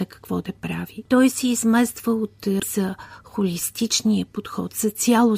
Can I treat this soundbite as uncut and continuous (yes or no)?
no